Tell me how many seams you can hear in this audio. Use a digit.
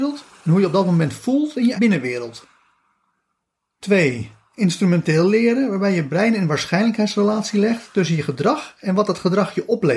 1